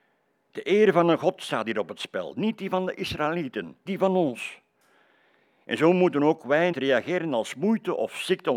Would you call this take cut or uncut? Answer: cut